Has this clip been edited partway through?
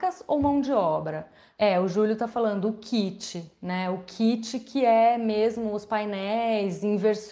no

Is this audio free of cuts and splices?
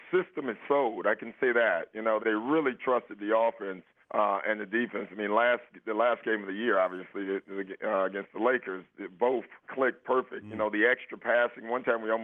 no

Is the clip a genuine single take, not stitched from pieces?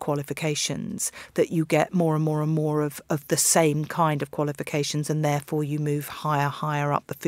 yes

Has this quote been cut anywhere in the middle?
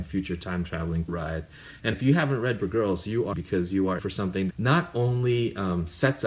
yes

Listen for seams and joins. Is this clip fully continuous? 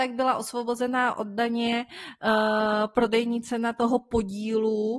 yes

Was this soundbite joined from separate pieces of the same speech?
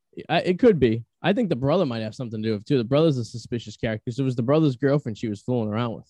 yes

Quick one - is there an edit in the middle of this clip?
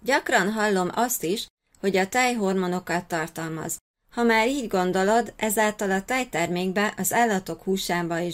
no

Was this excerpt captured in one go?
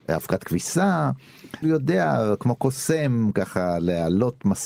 no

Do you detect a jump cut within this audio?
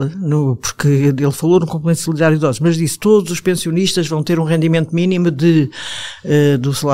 no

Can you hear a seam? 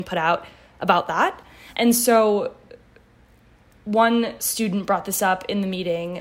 no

